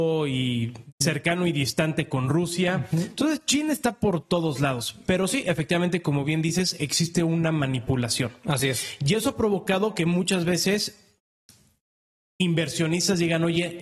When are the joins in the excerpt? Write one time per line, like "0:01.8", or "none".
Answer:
none